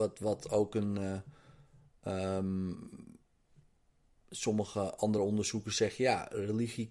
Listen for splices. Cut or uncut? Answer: uncut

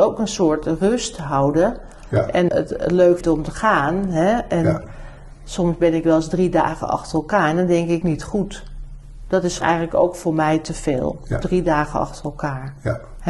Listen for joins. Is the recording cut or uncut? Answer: cut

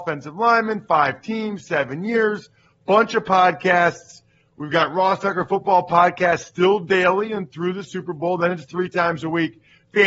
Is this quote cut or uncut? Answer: uncut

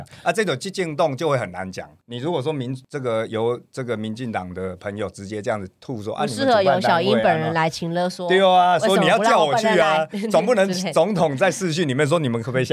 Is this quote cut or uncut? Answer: uncut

